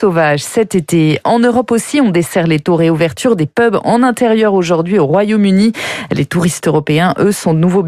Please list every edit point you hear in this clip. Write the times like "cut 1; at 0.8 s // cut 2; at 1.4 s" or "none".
none